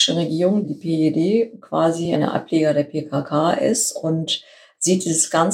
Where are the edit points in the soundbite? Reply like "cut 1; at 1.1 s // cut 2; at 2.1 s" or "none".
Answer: none